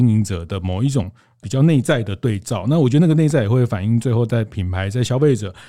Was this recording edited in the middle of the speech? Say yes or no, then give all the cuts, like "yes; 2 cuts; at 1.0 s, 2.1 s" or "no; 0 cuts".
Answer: no; 0 cuts